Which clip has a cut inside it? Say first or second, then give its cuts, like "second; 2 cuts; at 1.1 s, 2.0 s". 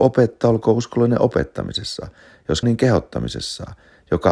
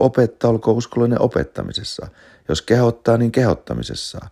first; 1 cut; at 2.6 s